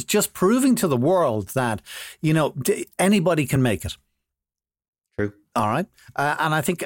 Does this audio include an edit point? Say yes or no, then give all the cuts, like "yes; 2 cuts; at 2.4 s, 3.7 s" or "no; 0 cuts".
no; 0 cuts